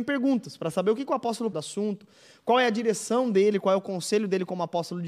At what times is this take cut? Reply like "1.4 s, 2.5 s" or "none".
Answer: 1.5 s